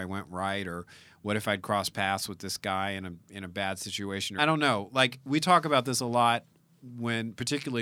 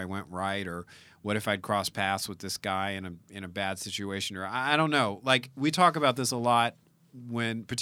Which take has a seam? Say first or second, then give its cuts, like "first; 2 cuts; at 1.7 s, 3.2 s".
first; 1 cut; at 4.4 s